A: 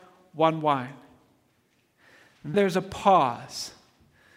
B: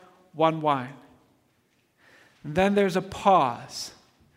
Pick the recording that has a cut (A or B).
A